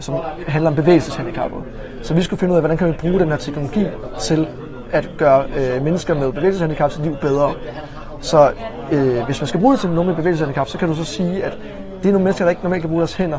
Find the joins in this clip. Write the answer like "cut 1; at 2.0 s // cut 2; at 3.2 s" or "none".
none